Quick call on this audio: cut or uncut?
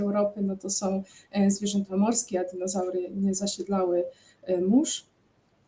uncut